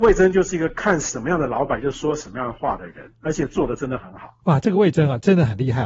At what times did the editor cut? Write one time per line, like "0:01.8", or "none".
0:04.4